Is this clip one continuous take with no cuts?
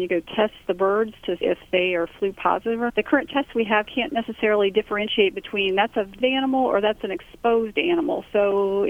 no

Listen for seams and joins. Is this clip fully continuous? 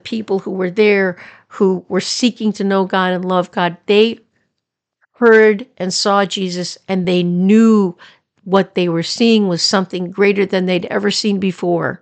yes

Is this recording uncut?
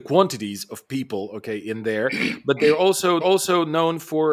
no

